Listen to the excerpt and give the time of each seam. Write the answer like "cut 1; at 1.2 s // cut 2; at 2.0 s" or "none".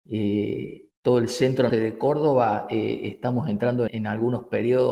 cut 1; at 0.9 s // cut 2; at 1.7 s // cut 3; at 3.9 s